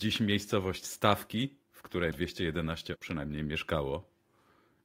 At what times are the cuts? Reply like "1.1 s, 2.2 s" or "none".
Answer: 1.6 s, 2.1 s, 3.0 s